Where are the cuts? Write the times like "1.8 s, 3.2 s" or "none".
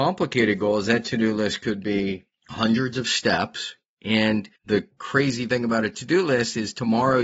2.4 s, 4.6 s